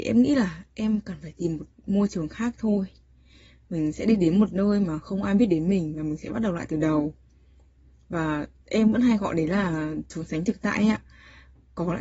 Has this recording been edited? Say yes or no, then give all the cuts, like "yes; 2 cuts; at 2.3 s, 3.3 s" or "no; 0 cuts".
no; 0 cuts